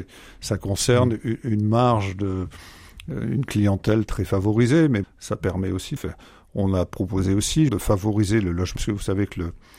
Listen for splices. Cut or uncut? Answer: cut